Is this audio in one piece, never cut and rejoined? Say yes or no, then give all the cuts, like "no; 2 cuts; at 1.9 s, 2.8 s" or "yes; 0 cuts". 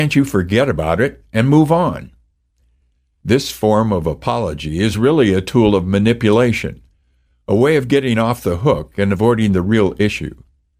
yes; 0 cuts